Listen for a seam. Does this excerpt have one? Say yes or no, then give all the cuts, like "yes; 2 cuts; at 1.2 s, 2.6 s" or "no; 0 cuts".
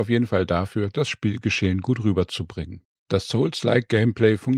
no; 0 cuts